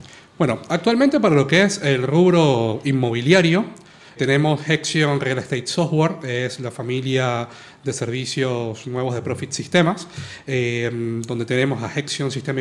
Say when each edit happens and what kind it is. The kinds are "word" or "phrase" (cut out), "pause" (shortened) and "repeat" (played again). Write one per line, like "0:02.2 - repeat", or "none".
0:04.2 - word